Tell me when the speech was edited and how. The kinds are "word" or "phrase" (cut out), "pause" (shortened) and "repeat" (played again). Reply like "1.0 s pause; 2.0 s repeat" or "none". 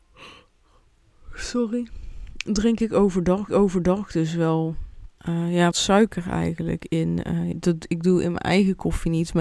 3.5 s repeat; 5.2 s pause; 5.7 s word; 7.5 s word